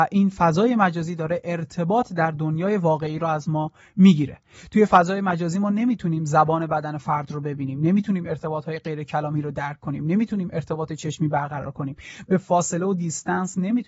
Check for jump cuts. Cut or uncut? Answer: uncut